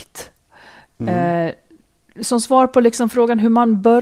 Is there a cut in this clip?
no; 0 cuts

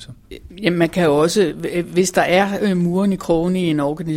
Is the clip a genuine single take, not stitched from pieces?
yes; 0 cuts

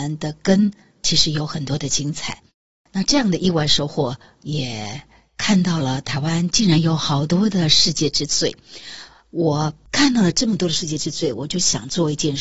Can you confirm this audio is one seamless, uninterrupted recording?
yes; 0 cuts

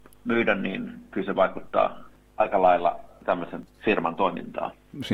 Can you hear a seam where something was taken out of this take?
no; 0 cuts

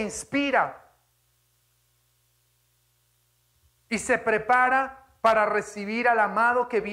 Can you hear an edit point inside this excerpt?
no; 0 cuts

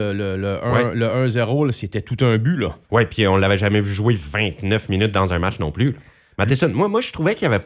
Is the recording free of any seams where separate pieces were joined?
no; 1 cut; at 2.8 s

